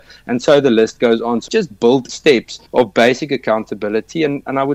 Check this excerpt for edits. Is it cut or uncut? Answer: cut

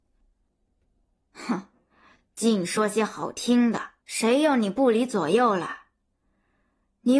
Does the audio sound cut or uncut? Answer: cut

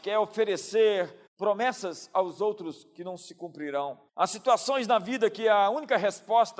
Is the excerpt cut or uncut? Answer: cut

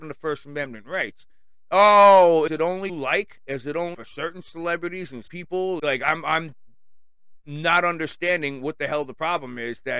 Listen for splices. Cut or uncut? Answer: cut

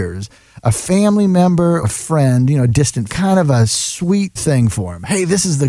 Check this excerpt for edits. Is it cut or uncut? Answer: cut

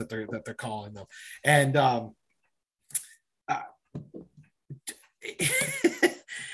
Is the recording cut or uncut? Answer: uncut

